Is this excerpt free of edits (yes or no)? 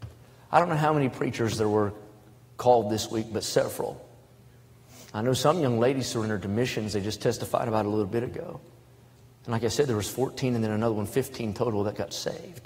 yes